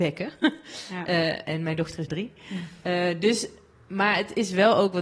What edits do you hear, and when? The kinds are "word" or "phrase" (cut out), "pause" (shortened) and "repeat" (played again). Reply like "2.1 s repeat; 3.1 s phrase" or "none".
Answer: 2.1 s word